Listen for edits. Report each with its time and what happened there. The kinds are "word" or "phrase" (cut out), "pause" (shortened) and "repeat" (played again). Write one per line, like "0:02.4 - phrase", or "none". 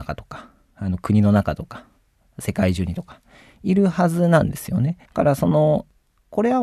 0:05.1 - pause